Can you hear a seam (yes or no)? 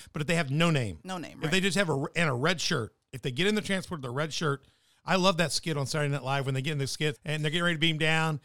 yes